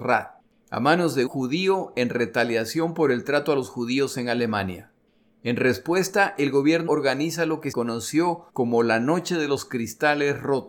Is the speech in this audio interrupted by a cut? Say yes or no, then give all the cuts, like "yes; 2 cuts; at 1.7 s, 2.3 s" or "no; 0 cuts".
yes; 5 cuts; at 1.3 s, 5.1 s, 6.9 s, 7.7 s, 8.5 s